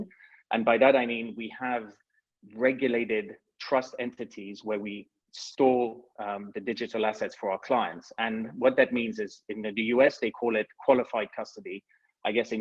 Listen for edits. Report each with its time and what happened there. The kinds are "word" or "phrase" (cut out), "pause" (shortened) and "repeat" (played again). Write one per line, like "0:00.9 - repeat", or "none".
none